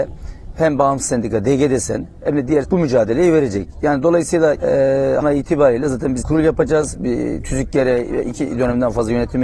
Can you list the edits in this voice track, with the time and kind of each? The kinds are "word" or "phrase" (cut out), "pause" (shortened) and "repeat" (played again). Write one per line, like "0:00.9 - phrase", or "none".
0:02.6 - word
0:04.6 - word
0:05.2 - word
0:06.2 - word